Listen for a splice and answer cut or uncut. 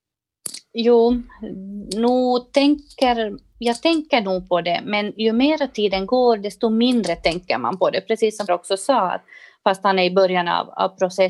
cut